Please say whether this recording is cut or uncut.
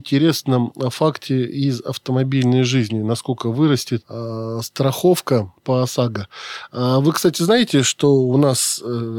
uncut